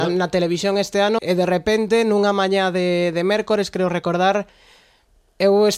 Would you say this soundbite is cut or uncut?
cut